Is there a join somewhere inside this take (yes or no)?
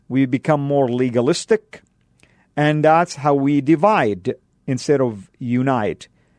no